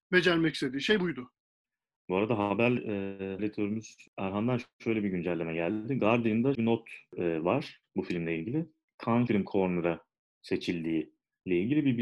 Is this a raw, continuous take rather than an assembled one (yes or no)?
no